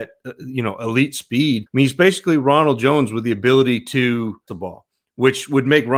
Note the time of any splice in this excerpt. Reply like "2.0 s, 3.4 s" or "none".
1.7 s, 4.5 s

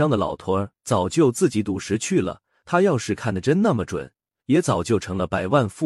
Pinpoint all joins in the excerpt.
none

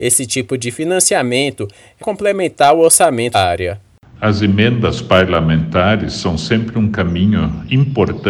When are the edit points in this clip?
2.0 s, 3.3 s

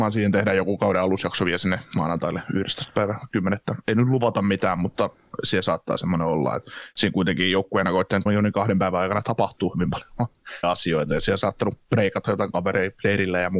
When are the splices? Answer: 8.3 s, 10.6 s

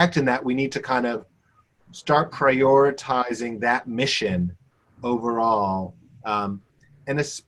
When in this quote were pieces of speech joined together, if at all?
none

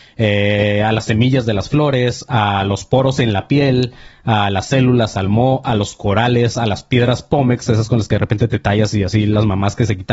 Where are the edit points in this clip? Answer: none

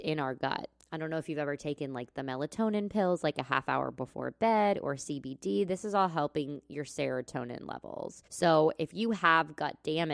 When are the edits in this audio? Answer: 8.3 s

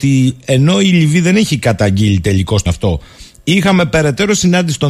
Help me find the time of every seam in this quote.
2.7 s

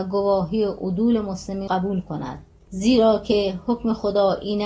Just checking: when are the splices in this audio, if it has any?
1.7 s

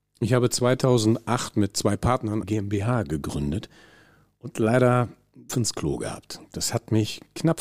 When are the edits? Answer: 2.4 s, 5.5 s

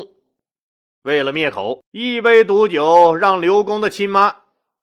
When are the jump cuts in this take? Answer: 1.8 s

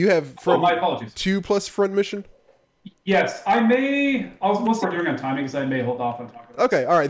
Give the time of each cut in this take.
1.1 s, 4.8 s

